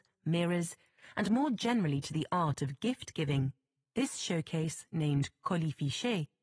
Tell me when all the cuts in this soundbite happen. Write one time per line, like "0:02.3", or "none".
none